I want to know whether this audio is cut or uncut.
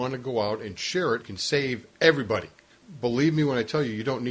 cut